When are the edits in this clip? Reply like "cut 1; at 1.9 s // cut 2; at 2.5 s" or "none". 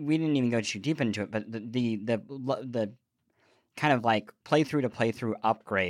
none